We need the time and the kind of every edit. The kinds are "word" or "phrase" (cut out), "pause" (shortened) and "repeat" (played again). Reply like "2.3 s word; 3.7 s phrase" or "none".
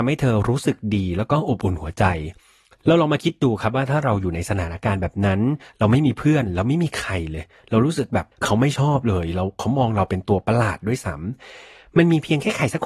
8.3 s pause